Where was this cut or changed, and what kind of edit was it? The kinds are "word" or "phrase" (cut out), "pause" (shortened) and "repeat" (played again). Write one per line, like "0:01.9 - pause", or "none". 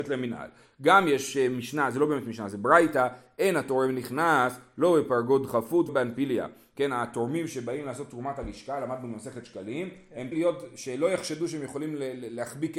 0:05.9 - word
0:10.3 - word